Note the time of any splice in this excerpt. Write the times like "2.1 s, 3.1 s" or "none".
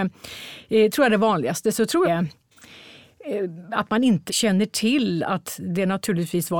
0.9 s, 2.0 s, 4.3 s